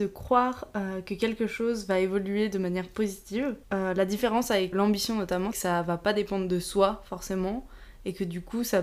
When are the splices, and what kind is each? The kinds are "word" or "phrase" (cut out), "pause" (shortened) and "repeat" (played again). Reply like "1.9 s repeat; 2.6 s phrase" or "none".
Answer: 3.6 s pause; 4.7 s word; 5.5 s word